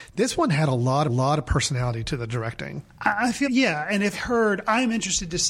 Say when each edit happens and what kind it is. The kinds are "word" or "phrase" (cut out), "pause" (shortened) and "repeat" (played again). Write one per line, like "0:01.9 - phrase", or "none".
0:01.1 - repeat
0:03.4 - word
0:04.1 - word